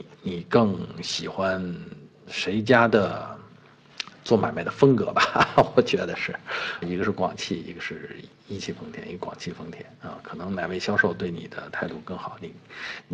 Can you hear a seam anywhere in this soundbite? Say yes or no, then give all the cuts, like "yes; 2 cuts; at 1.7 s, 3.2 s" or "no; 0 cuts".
yes; 1 cut; at 6.8 s